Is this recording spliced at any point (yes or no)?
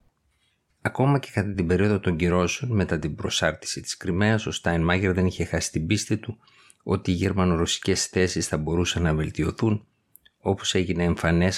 no